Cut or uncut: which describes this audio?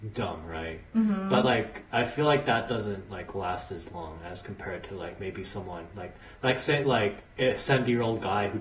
uncut